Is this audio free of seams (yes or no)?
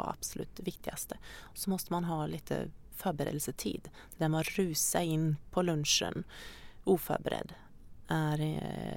yes